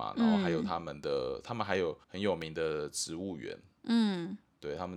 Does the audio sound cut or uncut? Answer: cut